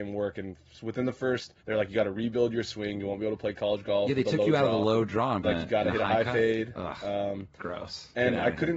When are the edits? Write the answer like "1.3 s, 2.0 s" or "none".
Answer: 1.6 s, 5.4 s